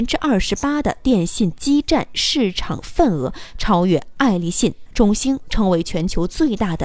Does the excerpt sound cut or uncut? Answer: cut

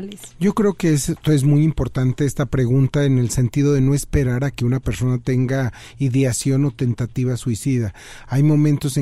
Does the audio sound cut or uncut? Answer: uncut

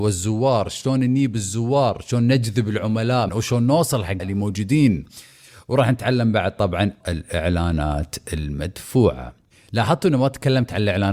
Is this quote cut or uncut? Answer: cut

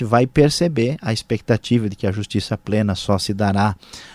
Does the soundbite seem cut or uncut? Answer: uncut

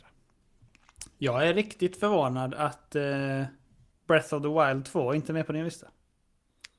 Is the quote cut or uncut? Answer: uncut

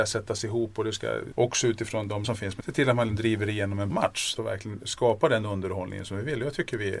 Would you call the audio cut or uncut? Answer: cut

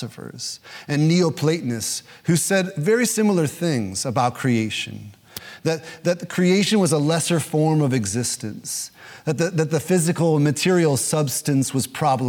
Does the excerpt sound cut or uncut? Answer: uncut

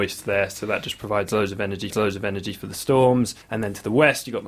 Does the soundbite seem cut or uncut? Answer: cut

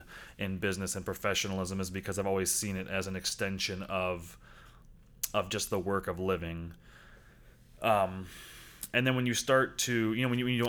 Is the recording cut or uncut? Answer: uncut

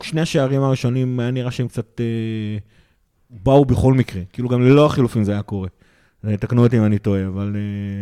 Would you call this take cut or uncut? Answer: uncut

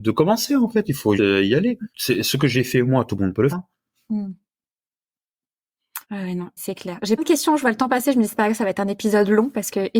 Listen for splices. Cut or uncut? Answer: cut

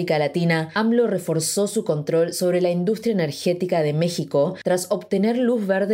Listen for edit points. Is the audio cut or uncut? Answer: uncut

